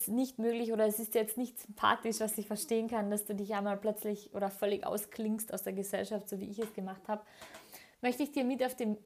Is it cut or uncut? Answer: uncut